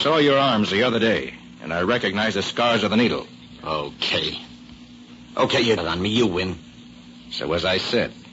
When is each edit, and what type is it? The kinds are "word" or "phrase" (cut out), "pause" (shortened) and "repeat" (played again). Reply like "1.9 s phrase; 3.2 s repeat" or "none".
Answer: 5.8 s word